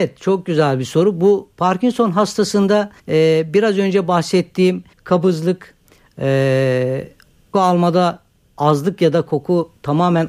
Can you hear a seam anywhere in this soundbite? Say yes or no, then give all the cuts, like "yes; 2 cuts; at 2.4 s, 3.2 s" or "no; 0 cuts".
yes; 3 cuts; at 3.0 s, 4.9 s, 7.5 s